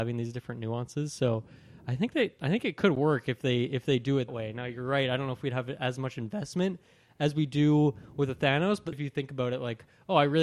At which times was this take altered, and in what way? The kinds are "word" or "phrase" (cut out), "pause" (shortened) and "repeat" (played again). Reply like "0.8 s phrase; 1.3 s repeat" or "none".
4.3 s word; 8.9 s word